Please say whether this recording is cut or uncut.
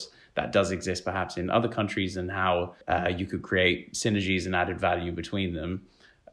cut